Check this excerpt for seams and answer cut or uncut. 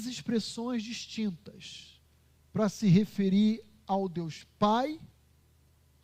uncut